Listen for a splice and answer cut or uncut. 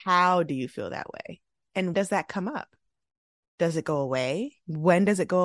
cut